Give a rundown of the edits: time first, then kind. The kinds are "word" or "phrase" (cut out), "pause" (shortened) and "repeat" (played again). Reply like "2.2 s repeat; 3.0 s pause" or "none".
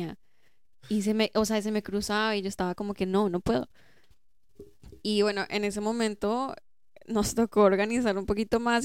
none